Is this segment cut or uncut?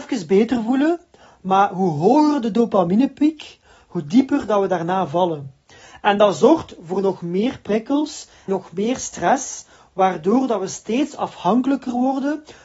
cut